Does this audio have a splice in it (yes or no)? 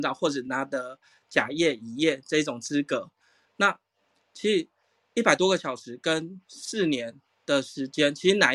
no